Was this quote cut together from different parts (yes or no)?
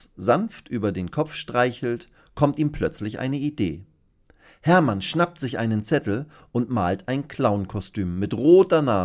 no